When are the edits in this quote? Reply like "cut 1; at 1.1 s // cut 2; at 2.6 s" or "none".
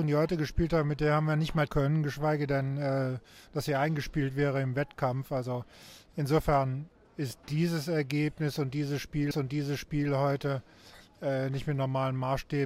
cut 1; at 1.7 s // cut 2; at 7.4 s // cut 3; at 9.3 s